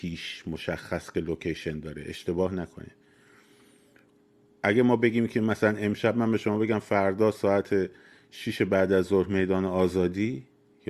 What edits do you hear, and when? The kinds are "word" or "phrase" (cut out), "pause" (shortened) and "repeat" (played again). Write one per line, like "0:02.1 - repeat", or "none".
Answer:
none